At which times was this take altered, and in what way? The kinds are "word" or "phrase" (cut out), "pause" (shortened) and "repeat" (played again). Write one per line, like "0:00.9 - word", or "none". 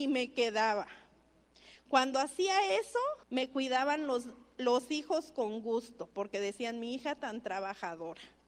0:03.2 - pause